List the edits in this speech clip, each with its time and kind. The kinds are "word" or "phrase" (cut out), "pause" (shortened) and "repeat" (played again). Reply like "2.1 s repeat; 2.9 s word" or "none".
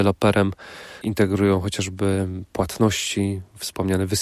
1.0 s word